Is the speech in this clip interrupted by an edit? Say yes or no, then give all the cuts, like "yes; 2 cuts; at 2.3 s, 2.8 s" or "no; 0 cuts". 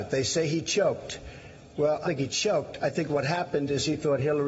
yes; 1 cut; at 2.0 s